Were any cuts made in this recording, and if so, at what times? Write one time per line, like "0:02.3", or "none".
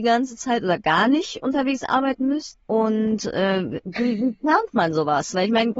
0:02.6